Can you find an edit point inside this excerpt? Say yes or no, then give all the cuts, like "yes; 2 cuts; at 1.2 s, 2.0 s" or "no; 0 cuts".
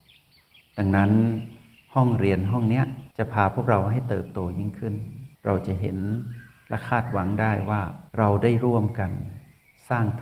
yes; 3 cuts; at 3.1 s, 5.3 s, 8.1 s